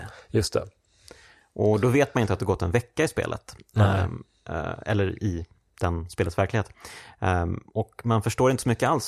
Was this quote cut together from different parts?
no; 0 cuts

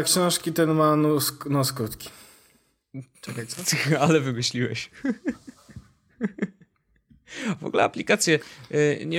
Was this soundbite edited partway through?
no; 0 cuts

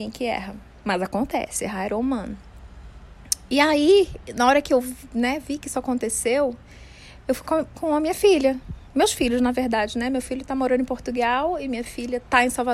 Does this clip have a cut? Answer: yes; 1 cut; at 7.4 s

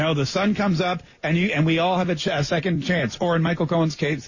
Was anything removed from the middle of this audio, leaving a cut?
no; 0 cuts

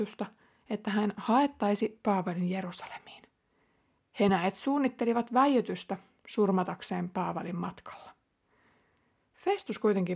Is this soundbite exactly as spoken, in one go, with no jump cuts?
yes; 0 cuts

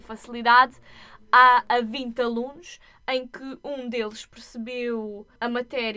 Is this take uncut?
yes; 0 cuts

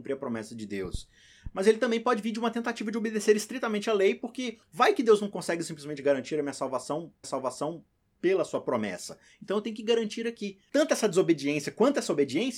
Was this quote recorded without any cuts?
no; 2 cuts; at 4.6 s, 7.2 s

